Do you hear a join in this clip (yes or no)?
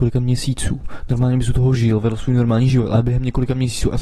no